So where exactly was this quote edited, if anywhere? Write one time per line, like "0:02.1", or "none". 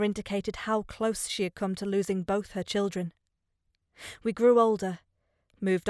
none